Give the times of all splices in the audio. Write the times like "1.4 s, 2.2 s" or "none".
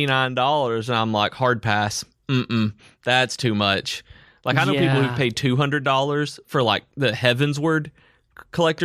none